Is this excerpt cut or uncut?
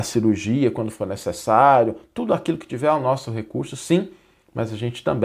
uncut